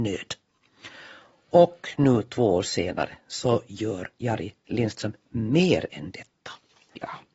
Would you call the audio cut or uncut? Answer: uncut